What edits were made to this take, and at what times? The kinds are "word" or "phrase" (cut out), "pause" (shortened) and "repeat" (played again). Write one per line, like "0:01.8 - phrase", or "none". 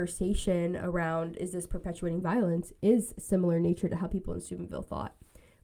none